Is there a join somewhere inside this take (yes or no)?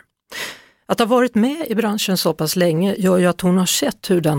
no